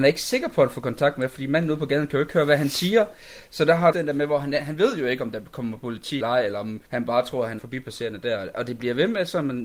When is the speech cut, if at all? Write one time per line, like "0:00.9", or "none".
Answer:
0:03.9
0:06.2
0:06.9
0:07.6

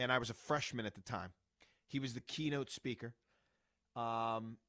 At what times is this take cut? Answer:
none

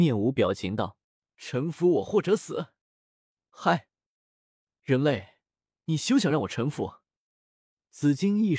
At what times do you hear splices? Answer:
0:01.0
0:02.8

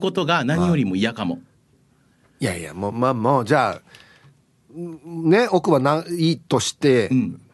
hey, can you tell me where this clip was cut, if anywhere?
none

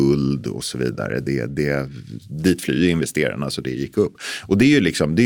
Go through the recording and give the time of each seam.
none

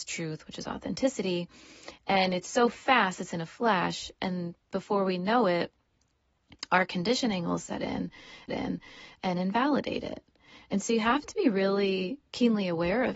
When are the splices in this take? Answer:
0:08.5

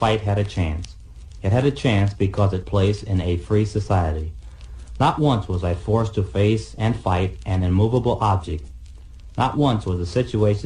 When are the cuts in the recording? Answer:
0:02.6

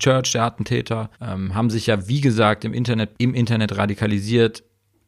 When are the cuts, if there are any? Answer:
0:01.1
0:03.1

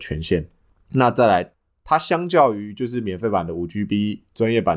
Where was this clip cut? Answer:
none

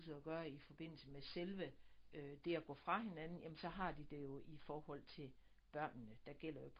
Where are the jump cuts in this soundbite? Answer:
none

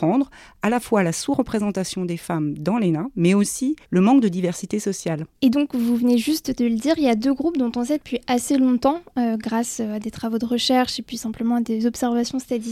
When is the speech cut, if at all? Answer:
0:03.8
0:05.3

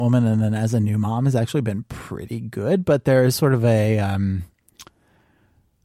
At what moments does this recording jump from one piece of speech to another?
none

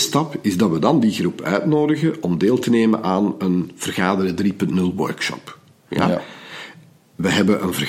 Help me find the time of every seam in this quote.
none

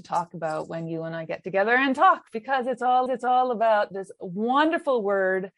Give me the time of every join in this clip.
0:03.1

